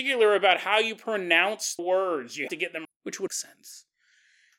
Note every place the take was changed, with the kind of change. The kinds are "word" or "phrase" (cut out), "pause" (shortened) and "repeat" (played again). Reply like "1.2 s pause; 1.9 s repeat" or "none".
1.8 s word; 2.5 s word; 2.8 s word; 3.3 s word